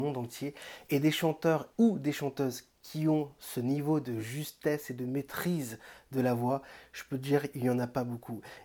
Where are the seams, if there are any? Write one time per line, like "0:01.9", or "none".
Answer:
0:01.7